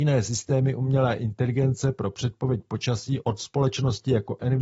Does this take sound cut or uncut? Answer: uncut